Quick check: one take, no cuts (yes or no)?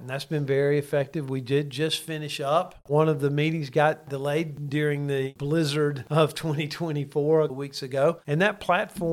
no